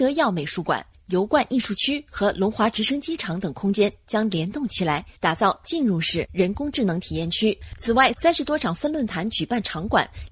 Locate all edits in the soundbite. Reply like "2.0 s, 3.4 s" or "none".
5.1 s